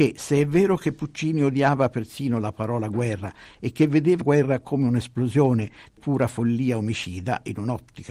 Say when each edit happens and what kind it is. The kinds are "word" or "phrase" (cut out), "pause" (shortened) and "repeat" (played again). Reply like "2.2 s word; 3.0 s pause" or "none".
4.2 s word; 6.0 s word